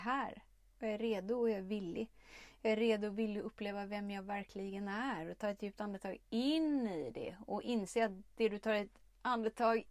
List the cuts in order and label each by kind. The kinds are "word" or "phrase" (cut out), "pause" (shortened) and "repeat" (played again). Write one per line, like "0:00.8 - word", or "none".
none